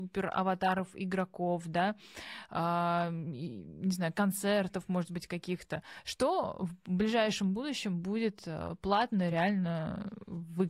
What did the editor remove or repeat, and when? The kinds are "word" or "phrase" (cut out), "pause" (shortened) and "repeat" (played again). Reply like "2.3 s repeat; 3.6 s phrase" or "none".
none